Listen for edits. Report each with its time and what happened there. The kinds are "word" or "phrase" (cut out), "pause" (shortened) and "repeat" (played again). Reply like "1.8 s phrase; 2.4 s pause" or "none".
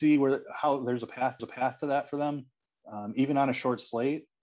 1.4 s repeat